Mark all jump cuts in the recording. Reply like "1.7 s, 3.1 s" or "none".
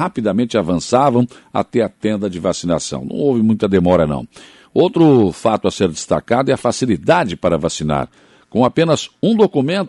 none